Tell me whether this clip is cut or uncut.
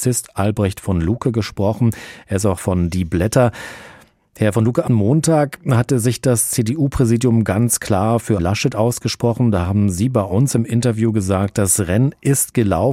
cut